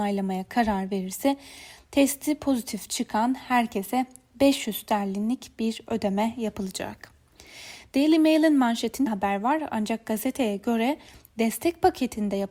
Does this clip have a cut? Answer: yes; 1 cut; at 9.1 s

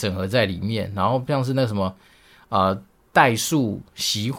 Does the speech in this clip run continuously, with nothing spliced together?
yes; 0 cuts

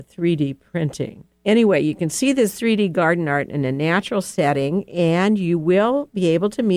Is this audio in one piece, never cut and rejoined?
yes; 0 cuts

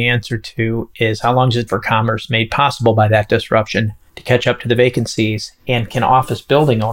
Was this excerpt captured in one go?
no; 1 cut; at 1.7 s

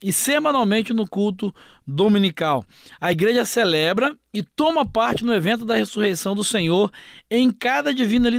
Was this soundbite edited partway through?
no; 0 cuts

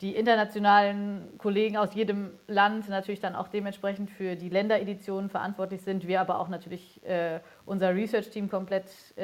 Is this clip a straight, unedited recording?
yes; 0 cuts

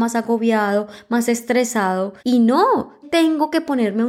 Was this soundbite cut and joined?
yes; 2 cuts; at 2.2 s, 3.0 s

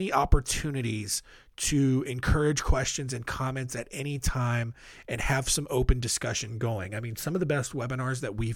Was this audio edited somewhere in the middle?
no; 0 cuts

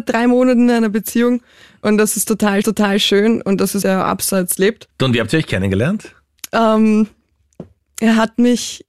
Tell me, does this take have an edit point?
yes; 3 cuts; at 2.6 s, 3.8 s, 4.6 s

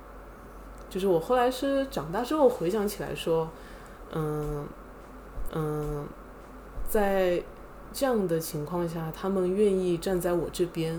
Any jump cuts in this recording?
yes; 1 cut; at 5.5 s

